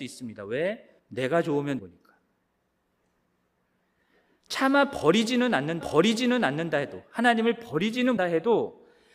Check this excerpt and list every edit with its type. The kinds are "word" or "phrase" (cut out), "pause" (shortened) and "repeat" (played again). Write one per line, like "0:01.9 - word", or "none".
0:01.0 - pause
0:01.8 - word
0:05.8 - repeat
0:08.2 - word